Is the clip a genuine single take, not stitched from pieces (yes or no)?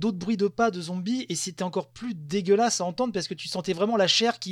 yes